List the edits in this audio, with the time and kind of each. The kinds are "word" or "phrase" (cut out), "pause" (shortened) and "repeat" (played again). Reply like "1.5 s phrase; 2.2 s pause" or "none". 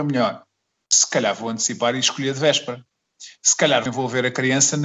3.9 s word